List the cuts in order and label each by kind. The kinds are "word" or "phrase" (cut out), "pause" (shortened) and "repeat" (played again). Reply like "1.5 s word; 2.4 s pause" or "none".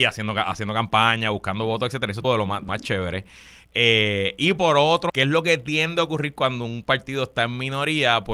2.2 s word; 2.7 s word; 5.1 s word